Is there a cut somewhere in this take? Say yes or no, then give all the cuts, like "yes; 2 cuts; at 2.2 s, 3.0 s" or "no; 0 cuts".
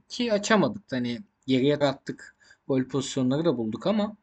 yes; 1 cut; at 1.8 s